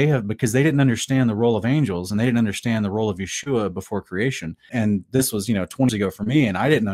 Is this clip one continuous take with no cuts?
no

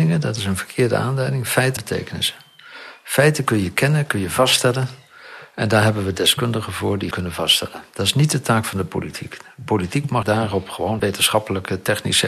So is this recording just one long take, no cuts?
no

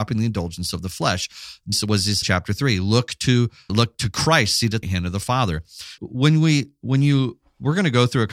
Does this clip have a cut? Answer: yes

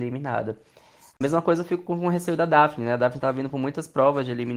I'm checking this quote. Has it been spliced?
no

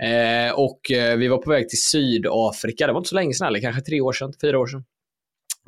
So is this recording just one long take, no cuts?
yes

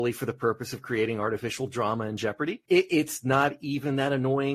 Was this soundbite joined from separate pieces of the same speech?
yes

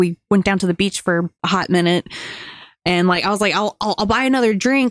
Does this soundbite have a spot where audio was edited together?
yes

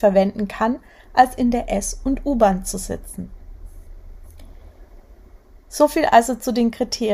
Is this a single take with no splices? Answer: yes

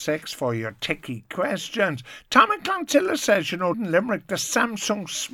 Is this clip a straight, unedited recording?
no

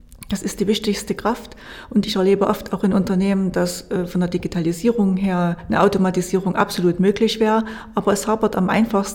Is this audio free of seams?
yes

